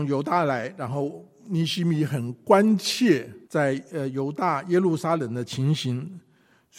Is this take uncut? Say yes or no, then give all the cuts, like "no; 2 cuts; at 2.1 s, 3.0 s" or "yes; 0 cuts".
no; 1 cut; at 3.4 s